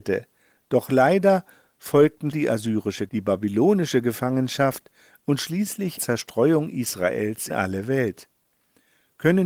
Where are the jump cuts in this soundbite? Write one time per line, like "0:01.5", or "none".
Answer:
0:02.3
0:03.1
0:06.0
0:07.5